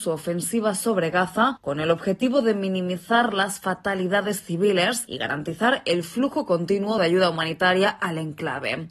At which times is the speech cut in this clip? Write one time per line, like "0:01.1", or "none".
none

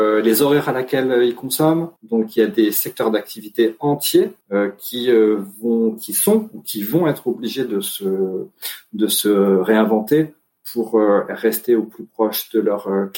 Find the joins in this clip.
0:02.0
0:04.4

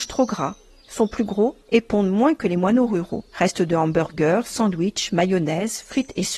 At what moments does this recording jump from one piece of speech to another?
0:01.6
0:03.3

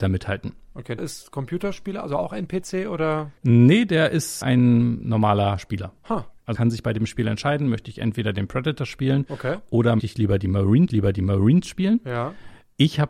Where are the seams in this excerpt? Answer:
0:01.0
0:03.4
0:04.4
0:06.0
0:06.5
0:10.0
0:10.9

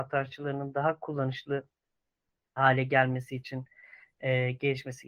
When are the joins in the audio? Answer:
none

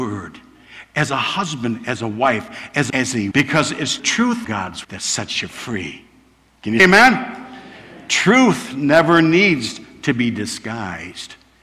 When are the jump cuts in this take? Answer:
0:02.9
0:03.3
0:04.0
0:04.4
0:04.8
0:06.8

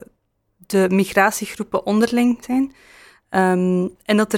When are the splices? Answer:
0:02.4

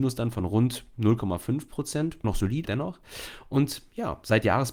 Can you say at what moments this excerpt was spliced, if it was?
0:02.2
0:02.7

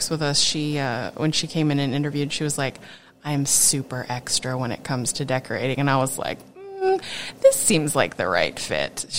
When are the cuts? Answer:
none

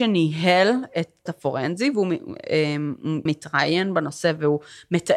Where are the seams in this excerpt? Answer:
0:01.3
0:03.3

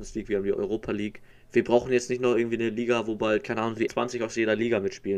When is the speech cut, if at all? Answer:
0:01.3
0:03.9

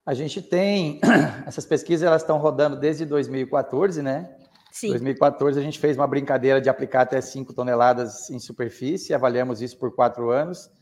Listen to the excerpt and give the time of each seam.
none

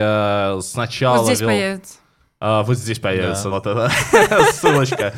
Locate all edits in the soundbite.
0:03.5

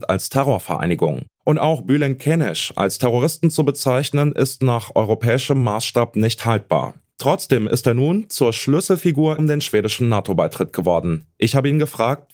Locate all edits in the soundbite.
0:01.3
0:09.4

